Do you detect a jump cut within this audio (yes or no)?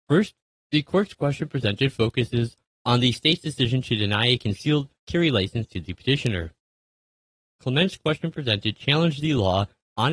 no